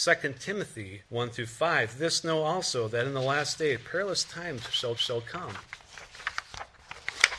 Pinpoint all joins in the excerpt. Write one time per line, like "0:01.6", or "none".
0:01.1
0:05.0